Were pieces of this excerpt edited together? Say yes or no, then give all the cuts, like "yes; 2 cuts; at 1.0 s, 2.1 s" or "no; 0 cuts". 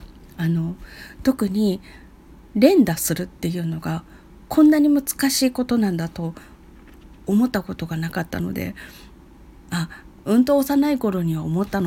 yes; 1 cut; at 2.4 s